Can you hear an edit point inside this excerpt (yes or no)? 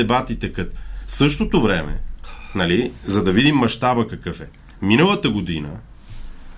no